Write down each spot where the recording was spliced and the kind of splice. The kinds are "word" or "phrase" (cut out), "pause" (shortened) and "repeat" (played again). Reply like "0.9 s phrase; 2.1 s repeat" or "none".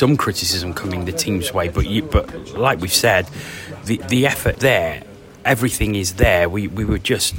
4.5 s word